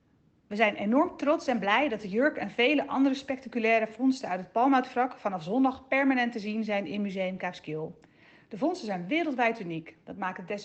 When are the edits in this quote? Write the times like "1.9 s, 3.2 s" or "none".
none